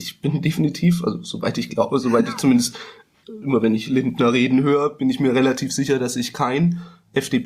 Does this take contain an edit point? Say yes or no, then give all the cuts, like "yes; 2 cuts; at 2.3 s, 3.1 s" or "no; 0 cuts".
yes; 1 cut; at 3.4 s